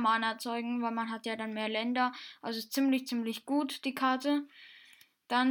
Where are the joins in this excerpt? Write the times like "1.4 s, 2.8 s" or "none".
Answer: none